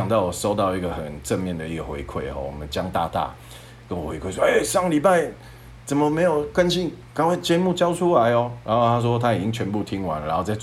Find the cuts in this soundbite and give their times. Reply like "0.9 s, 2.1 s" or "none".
none